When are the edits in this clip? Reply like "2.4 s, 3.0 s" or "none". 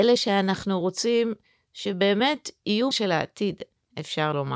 2.9 s